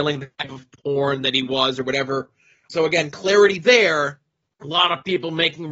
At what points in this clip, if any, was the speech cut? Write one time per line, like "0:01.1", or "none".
0:02.7